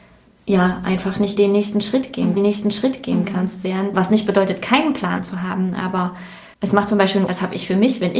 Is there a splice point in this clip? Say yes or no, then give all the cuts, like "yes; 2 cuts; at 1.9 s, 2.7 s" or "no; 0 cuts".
yes; 5 cuts; at 1.4 s, 2.4 s, 3.9 s, 6.5 s, 7.3 s